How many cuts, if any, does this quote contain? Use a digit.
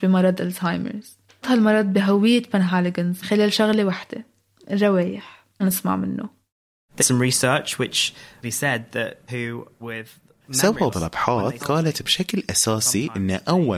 9